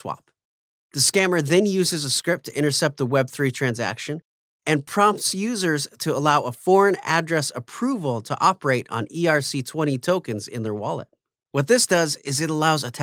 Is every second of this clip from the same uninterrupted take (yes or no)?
yes